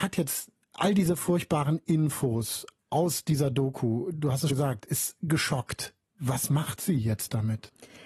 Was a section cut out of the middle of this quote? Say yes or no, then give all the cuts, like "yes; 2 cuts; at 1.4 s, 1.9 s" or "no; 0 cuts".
yes; 1 cut; at 4.5 s